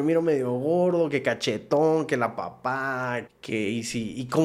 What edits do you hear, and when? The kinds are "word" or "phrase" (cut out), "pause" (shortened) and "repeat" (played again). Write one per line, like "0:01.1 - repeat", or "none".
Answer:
0:03.3 - word